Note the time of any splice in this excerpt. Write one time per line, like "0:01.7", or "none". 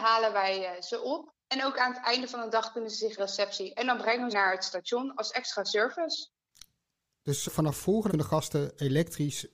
0:01.4
0:03.2
0:04.3
0:07.4
0:08.1